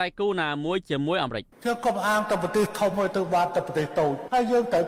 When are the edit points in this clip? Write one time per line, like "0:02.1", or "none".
0:01.5

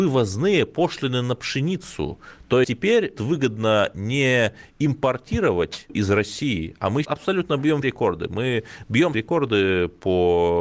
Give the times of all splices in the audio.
0:02.6
0:03.2
0:05.9
0:07.0
0:07.8
0:09.1

